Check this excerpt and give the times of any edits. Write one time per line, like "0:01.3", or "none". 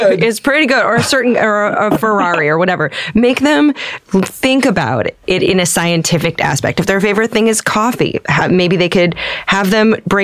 none